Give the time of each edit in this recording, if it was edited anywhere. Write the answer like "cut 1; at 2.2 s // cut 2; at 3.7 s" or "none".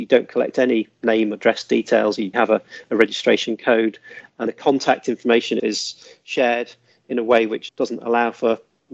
cut 1; at 2.3 s // cut 2; at 4.5 s // cut 3; at 5.6 s // cut 4; at 7.7 s